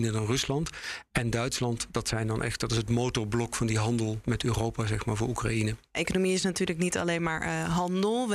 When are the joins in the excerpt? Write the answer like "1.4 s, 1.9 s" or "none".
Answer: 4.2 s